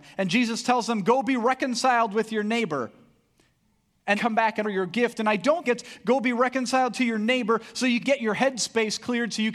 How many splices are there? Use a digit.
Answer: 4